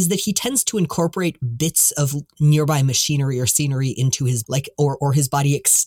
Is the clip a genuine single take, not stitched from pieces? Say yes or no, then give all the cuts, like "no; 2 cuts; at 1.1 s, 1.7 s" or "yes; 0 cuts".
no; 1 cut; at 4.4 s